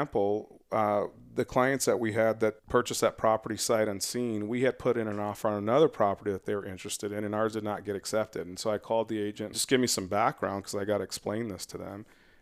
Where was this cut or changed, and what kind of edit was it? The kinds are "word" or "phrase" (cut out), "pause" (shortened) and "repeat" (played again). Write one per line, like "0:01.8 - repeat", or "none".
0:02.6 - pause
0:09.5 - phrase